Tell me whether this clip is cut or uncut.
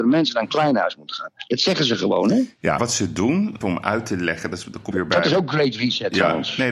cut